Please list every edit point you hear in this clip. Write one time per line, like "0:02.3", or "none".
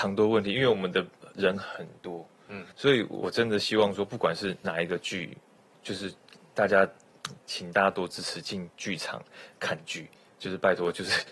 0:02.7

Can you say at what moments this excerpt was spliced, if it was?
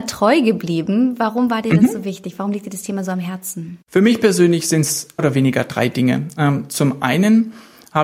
0:05.2

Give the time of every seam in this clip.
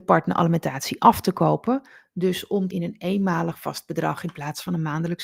0:02.7

